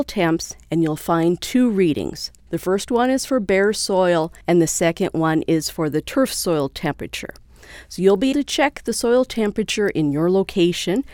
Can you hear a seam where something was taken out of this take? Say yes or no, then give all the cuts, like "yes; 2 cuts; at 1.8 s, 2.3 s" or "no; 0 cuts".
yes; 2 cuts; at 4.4 s, 8.3 s